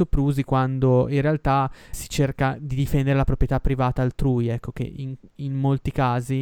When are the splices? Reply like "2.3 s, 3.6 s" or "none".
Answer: 1.9 s

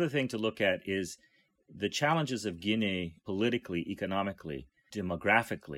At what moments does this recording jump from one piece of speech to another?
none

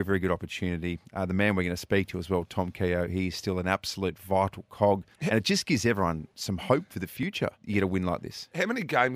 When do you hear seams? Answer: 5.1 s, 7.5 s

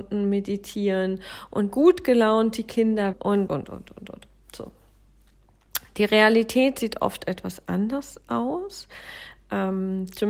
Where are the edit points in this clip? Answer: 1.7 s, 3.1 s, 3.5 s

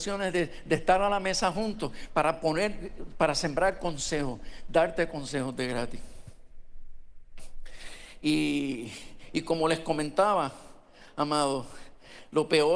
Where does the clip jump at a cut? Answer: none

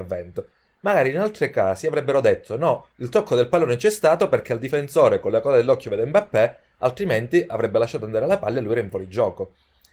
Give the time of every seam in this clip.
2.9 s

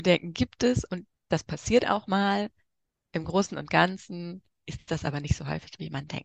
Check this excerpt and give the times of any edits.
none

